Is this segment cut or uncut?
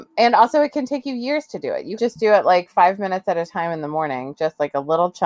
cut